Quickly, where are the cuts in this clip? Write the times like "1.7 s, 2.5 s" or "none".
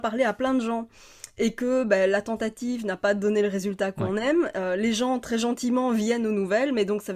none